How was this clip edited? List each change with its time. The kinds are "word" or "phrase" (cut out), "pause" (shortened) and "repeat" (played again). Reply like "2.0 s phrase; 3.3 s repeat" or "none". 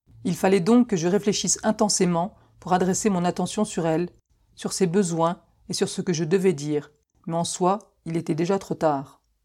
none